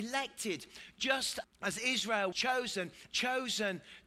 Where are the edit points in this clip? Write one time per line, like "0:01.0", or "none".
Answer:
0:01.4
0:02.3
0:03.1